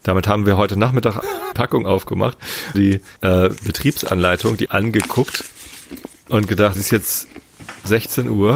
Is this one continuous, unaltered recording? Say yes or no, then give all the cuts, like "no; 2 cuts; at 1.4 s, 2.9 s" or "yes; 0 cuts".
no; 6 cuts; at 1.2 s, 1.5 s, 2.7 s, 3.2 s, 4.7 s, 6.7 s